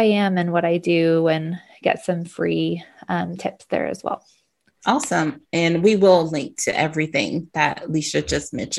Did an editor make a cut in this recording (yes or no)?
no